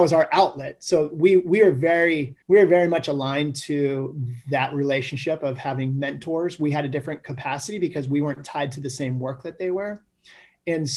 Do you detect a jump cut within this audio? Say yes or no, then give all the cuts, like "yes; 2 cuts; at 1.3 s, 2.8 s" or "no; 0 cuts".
yes; 1 cut; at 2.4 s